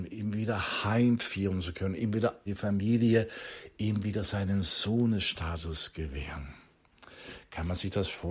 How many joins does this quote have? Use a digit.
1